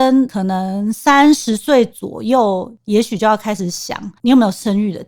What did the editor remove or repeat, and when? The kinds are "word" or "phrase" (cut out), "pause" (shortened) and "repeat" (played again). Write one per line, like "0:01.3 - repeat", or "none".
0:04.2 - pause